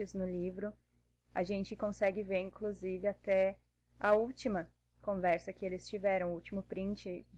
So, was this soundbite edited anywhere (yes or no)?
no